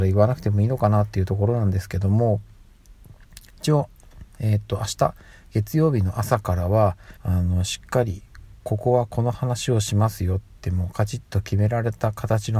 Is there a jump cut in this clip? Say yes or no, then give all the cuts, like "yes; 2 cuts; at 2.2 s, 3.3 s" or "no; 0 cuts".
yes; 1 cut; at 7.2 s